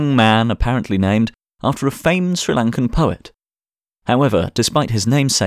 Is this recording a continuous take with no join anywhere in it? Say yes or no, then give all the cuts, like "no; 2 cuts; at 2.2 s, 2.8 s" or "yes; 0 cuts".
yes; 0 cuts